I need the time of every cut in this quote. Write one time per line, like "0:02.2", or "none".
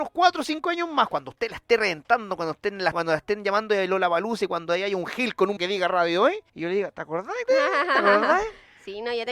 0:02.9
0:05.6
0:06.5
0:07.5